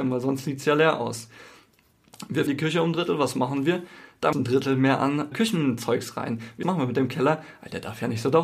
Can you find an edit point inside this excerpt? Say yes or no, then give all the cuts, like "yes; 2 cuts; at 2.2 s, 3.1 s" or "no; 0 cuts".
yes; 4 cuts; at 2.5 s, 4.3 s, 5.3 s, 6.6 s